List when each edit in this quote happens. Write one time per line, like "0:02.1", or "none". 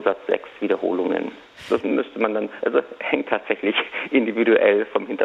none